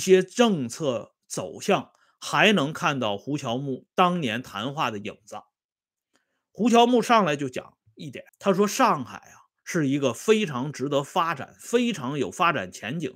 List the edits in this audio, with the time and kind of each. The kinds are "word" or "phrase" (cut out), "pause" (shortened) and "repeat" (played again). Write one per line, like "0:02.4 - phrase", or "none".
0:08.3 - pause
0:09.6 - pause